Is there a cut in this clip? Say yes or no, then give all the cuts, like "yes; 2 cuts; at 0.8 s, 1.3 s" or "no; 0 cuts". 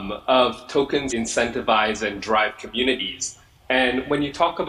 yes; 1 cut; at 1.1 s